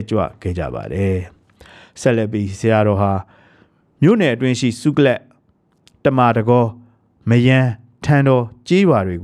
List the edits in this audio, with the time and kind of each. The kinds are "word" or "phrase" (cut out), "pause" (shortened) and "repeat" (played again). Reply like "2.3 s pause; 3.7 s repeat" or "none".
none